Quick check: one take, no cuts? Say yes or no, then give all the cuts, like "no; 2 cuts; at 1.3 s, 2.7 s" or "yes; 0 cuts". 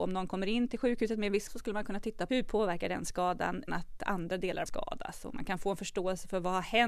no; 4 cuts; at 1.5 s, 2.3 s, 3.7 s, 4.7 s